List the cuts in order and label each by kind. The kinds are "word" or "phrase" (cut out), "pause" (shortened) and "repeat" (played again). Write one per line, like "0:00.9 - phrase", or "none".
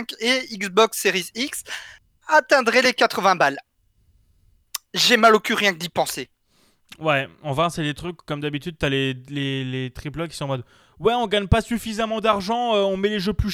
none